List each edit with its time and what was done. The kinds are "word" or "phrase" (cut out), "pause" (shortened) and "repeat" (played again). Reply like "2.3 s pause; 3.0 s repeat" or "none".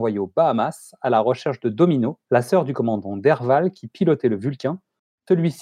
2.2 s pause